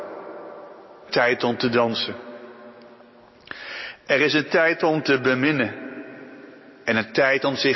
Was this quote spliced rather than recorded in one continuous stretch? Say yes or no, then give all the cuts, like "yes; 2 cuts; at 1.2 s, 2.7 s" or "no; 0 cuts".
yes; 1 cut; at 1.1 s